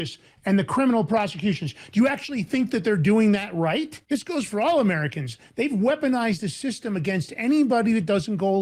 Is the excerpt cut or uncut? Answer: cut